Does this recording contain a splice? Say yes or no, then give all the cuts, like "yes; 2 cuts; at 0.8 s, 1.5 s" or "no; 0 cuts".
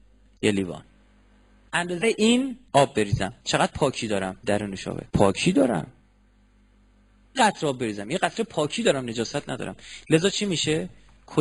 yes; 7 cuts; at 1.7 s, 2.0 s, 2.7 s, 3.4 s, 4.4 s, 5.1 s, 7.4 s